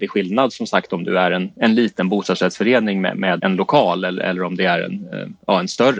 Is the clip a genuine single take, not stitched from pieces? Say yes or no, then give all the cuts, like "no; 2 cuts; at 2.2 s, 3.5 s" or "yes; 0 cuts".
no; 1 cut; at 3.4 s